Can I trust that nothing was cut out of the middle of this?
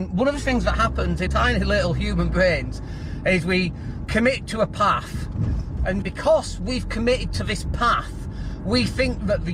no; 2 cuts; at 1.3 s, 6.0 s

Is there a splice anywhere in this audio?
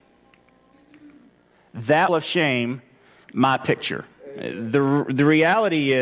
yes; 2 cuts; at 2.1 s, 3.2 s

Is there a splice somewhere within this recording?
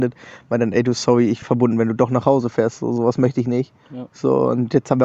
yes; 2 cuts; at 1.4 s, 3.8 s

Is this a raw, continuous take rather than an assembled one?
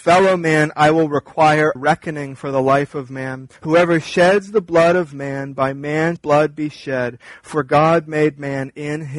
no; 3 cuts; at 1.8 s, 3.6 s, 6.2 s

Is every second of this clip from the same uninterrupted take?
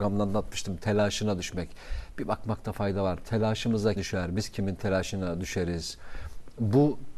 no; 1 cut; at 4.0 s

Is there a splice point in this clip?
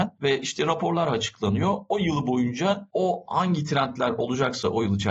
no; 0 cuts

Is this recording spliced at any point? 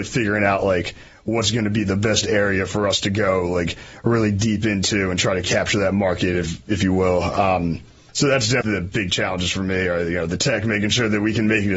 no; 0 cuts

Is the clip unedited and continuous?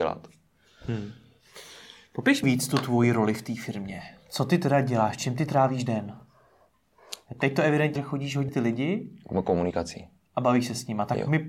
no; 3 cuts; at 2.4 s, 8.0 s, 8.5 s

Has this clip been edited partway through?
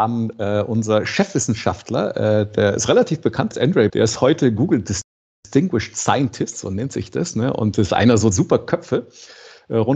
yes; 3 cuts; at 3.5 s, 3.9 s, 8.3 s

